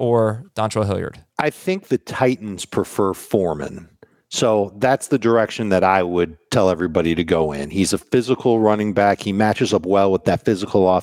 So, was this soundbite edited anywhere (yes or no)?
yes